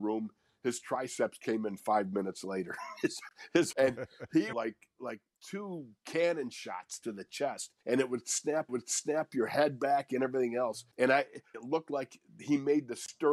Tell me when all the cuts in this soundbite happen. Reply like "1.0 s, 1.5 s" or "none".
3.7 s, 4.5 s, 5.4 s, 7.8 s, 8.7 s, 10.9 s, 11.5 s